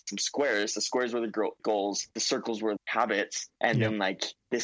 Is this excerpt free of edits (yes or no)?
no